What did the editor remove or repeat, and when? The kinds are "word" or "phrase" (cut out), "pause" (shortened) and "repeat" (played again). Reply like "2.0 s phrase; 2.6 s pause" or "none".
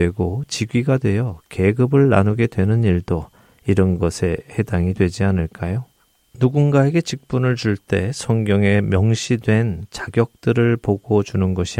none